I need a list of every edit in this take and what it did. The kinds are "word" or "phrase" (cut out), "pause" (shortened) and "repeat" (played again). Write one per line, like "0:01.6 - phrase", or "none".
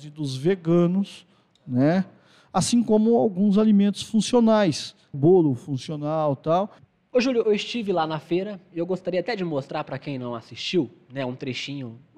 0:05.1 - word
0:07.4 - word